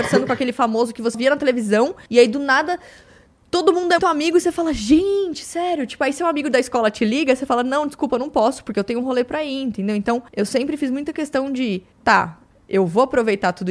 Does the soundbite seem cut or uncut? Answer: cut